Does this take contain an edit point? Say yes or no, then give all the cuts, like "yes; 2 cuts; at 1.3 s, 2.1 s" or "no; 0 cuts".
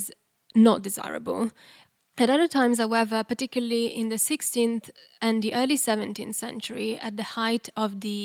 no; 0 cuts